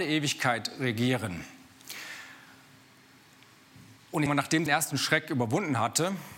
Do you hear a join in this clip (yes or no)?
yes